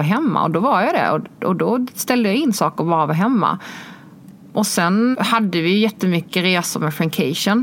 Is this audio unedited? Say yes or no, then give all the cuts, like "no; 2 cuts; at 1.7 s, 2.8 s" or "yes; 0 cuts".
no; 1 cut; at 5.1 s